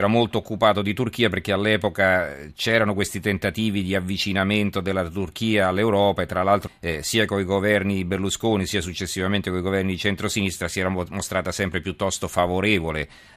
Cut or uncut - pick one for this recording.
cut